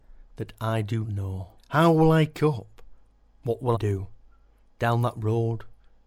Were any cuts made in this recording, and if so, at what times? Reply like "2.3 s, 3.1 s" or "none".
1.0 s, 1.6 s, 3.7 s

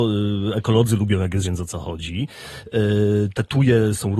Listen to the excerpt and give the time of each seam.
1.4 s

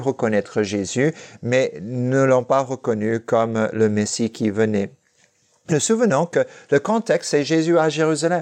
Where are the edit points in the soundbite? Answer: 5.7 s

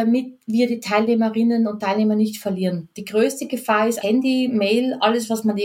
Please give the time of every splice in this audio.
4.0 s

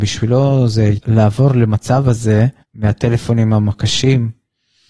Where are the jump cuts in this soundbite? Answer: 1.0 s, 2.6 s

